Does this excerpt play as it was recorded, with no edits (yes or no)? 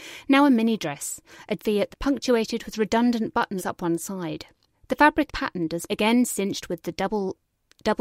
no